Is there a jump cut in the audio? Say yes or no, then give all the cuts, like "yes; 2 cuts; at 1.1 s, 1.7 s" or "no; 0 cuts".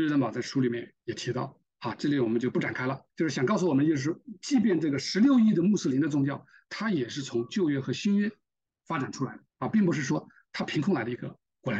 yes; 4 cuts; at 1.0 s, 1.7 s, 3.1 s, 9.5 s